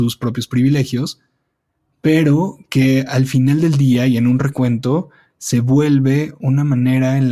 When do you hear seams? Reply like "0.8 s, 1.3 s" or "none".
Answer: none